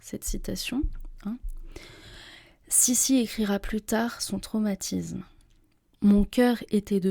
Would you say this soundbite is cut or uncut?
uncut